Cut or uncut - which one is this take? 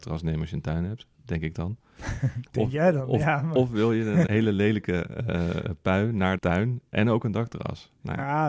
cut